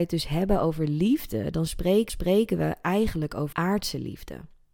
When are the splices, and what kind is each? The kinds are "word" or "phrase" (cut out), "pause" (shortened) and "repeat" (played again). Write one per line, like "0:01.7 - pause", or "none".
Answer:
0:02.1 - repeat
0:03.5 - word